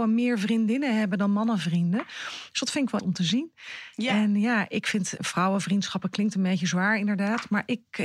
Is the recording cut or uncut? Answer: cut